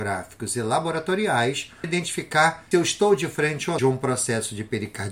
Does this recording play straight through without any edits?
no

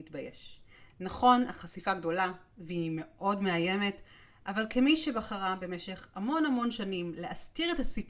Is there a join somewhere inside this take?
no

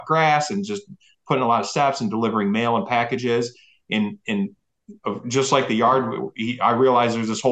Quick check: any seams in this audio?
no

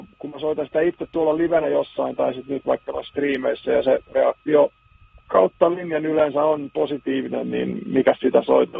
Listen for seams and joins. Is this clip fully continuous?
yes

